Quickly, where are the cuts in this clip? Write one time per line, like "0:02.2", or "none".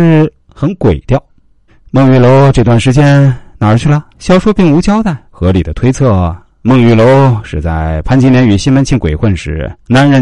0:01.7
0:04.1
0:05.3